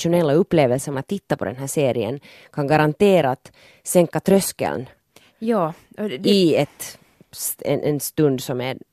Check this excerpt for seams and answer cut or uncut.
cut